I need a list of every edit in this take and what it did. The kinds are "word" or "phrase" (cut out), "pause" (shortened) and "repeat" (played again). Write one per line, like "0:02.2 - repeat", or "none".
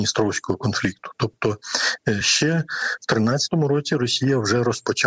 none